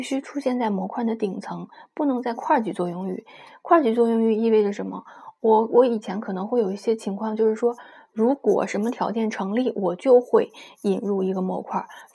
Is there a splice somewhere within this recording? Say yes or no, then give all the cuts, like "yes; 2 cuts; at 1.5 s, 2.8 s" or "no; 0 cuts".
no; 0 cuts